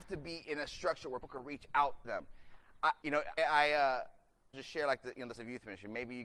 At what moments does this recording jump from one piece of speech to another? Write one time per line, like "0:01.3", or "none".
0:01.2
0:02.0
0:03.0
0:03.4
0:04.5
0:05.4